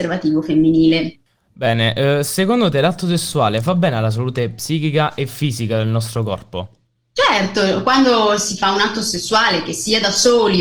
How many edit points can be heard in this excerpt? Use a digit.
0